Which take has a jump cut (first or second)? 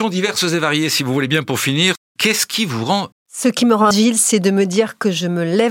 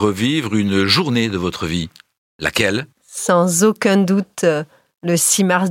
first